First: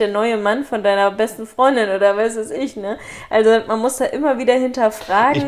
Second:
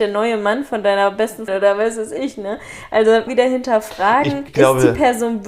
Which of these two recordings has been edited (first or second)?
second